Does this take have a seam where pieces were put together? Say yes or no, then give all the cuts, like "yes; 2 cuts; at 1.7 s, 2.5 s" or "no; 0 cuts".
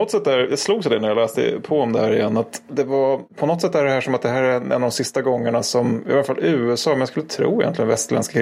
no; 0 cuts